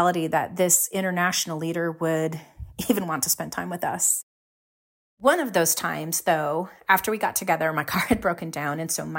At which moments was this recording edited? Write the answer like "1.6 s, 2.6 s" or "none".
none

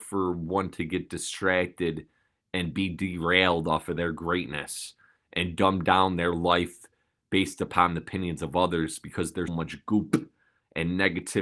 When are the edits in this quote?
9.5 s

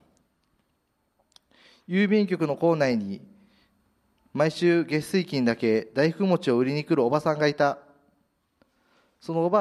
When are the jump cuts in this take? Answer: none

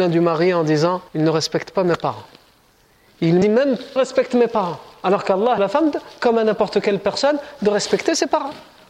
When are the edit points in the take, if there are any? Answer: 1.1 s, 3.4 s, 4.0 s, 5.6 s

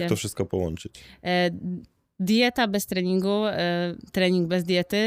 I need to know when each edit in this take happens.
none

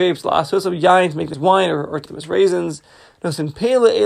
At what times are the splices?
1.3 s, 2.1 s

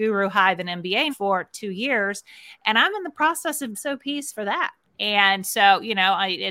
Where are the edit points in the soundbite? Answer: 1.1 s, 3.7 s, 4.8 s

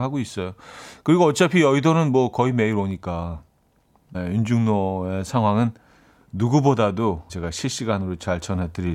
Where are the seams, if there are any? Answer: 4.1 s, 7.3 s

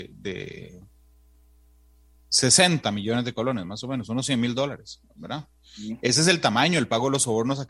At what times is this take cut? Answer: none

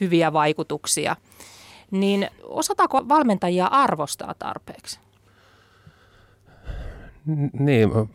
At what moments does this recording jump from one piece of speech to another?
2.4 s

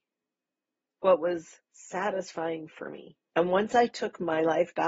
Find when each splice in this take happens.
3.3 s

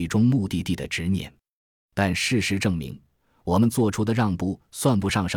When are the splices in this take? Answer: none

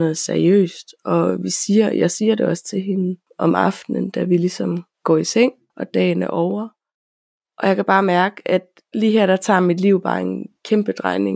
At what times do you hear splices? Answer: 4.9 s

